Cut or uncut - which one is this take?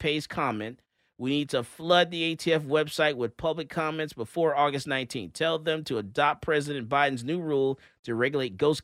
uncut